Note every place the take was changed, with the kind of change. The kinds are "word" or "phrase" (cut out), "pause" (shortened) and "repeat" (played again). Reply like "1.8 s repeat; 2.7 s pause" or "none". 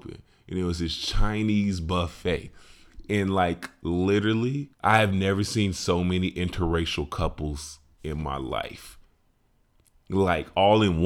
4.7 s pause